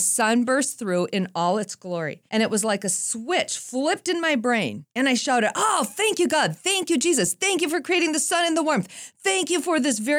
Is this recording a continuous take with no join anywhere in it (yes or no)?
no